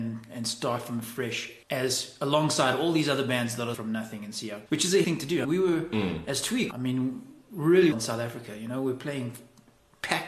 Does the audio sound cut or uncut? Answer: cut